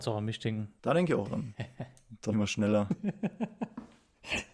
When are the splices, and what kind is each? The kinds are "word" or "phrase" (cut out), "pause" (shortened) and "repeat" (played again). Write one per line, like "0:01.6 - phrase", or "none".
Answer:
0:01.2 - word
0:02.3 - word